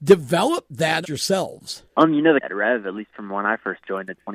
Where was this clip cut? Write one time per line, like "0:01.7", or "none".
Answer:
0:01.0
0:01.9
0:02.4